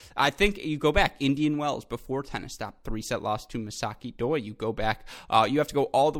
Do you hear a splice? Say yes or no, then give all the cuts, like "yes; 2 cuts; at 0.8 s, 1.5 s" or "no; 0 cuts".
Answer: no; 0 cuts